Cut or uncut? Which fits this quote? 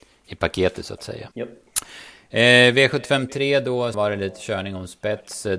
cut